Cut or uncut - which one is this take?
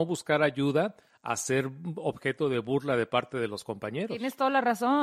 uncut